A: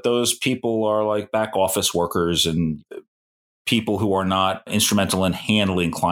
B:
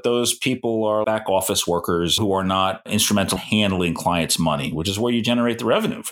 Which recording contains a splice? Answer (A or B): B